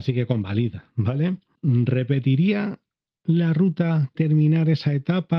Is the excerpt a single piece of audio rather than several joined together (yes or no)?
no